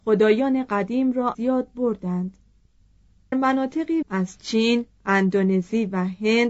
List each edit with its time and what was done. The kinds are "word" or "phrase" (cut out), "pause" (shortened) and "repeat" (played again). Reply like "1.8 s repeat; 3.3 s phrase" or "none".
1.3 s word; 3.3 s word; 4.0 s word